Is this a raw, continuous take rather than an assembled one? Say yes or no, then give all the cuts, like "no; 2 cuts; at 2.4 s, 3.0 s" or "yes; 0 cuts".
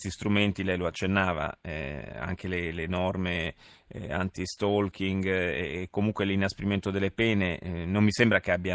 yes; 0 cuts